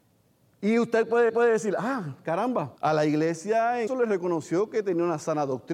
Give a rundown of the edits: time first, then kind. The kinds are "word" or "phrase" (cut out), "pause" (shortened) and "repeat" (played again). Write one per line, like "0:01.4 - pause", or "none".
0:01.3 - repeat
0:02.8 - pause
0:03.9 - word